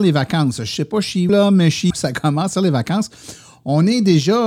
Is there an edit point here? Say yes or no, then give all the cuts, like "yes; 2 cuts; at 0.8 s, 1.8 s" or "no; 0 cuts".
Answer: yes; 3 cuts; at 1.3 s, 1.9 s, 2.5 s